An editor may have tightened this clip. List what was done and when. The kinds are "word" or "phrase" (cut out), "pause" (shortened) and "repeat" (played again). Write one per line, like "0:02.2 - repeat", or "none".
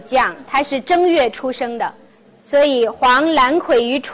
0:02.1 - pause